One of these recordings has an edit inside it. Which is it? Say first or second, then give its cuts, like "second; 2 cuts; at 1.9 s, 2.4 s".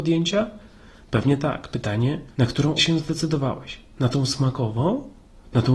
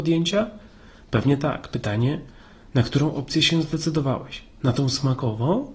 first; 2 cuts; at 2.3 s, 2.8 s